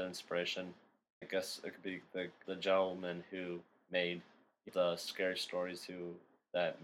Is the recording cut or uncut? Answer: cut